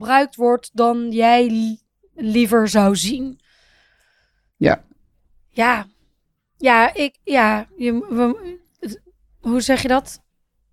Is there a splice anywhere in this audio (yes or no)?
no